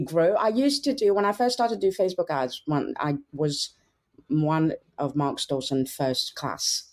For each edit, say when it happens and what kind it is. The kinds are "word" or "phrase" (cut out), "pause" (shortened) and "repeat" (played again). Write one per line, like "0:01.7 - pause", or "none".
none